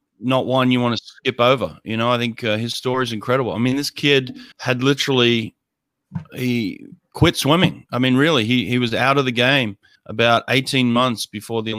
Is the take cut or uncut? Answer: cut